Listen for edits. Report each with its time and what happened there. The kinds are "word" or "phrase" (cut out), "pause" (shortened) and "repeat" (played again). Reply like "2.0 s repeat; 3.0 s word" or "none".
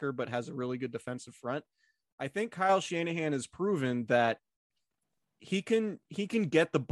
none